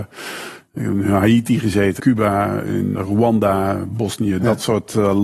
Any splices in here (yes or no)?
yes